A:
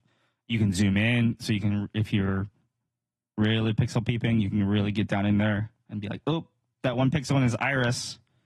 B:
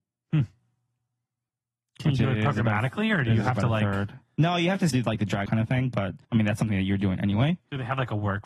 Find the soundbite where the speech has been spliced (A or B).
B